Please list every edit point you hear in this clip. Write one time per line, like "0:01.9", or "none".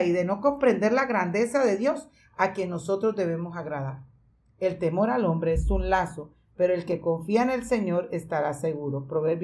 none